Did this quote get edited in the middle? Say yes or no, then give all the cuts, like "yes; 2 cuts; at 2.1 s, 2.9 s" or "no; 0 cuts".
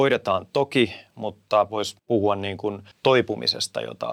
yes; 2 cuts; at 2.0 s, 2.9 s